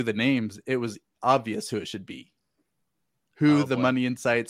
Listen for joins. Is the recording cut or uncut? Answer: uncut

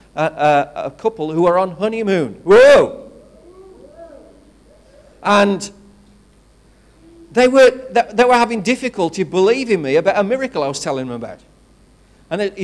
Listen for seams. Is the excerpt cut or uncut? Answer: uncut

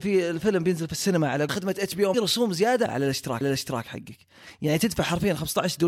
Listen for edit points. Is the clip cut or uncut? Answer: cut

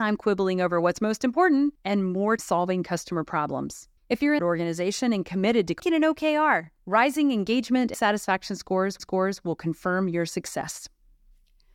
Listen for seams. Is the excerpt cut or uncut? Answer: cut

